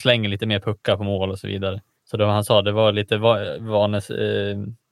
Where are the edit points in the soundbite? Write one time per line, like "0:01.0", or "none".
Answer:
0:02.0